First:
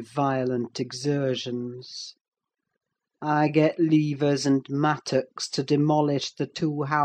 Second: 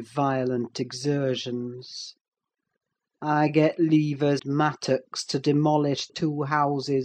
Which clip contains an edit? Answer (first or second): second